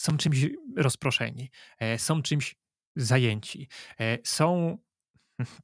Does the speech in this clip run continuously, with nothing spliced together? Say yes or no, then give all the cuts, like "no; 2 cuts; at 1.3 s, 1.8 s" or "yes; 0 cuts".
yes; 0 cuts